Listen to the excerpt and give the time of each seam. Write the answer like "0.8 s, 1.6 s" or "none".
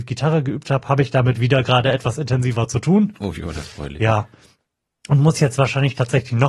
none